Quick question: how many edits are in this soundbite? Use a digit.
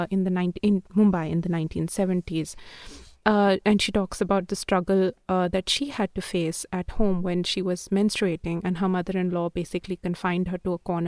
0